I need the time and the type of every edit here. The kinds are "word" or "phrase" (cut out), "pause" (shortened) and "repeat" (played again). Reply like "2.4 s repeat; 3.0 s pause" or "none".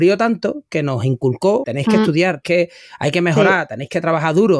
1.6 s word; 2.4 s word